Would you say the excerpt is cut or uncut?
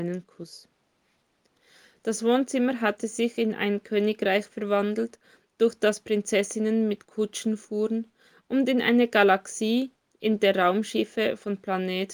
uncut